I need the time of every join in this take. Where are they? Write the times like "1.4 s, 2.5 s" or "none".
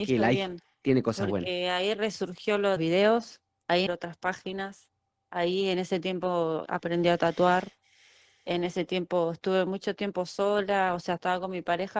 2.8 s, 3.9 s, 6.7 s

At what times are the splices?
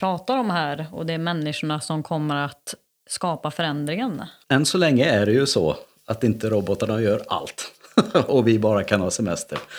none

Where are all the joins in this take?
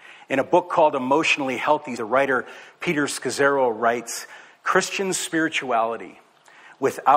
2.0 s

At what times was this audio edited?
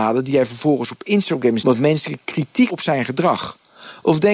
1.6 s, 2.7 s

